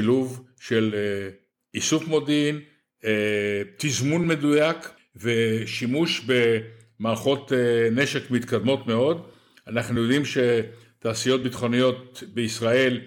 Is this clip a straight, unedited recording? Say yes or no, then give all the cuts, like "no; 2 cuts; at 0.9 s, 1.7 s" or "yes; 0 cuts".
yes; 0 cuts